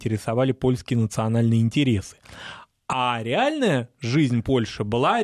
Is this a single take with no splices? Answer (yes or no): yes